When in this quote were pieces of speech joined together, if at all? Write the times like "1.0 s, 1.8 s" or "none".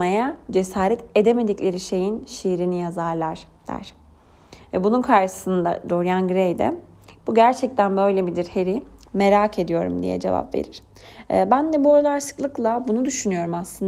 none